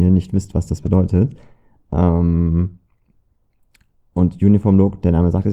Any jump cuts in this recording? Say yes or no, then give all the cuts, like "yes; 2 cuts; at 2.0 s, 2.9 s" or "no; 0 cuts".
no; 0 cuts